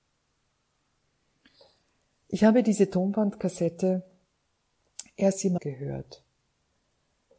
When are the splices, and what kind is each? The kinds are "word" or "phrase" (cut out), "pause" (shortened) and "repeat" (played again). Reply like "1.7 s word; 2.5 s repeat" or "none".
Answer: 5.6 s word